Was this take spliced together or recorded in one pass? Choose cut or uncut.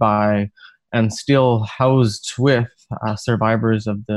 uncut